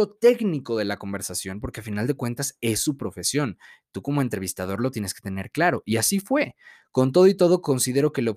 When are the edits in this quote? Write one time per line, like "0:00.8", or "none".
none